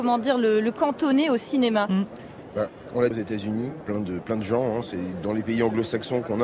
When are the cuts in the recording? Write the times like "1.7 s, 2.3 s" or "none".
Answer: 3.1 s, 3.8 s